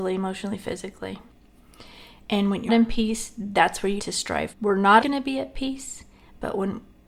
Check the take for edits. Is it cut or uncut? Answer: cut